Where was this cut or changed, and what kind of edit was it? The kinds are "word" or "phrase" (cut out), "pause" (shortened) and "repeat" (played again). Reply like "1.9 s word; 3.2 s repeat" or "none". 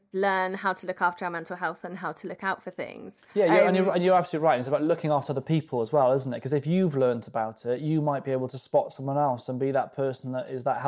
3.3 s pause